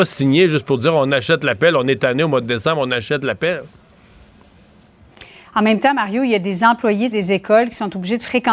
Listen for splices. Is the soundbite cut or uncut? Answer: cut